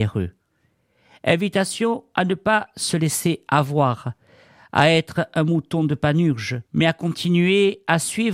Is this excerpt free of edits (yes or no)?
no